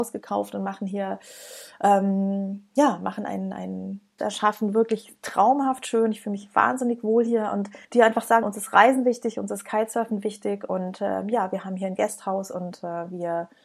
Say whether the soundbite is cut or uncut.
cut